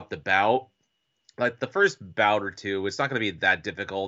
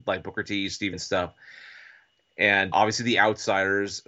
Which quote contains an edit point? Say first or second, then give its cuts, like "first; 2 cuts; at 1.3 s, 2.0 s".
second; 2 cuts; at 0.9 s, 2.7 s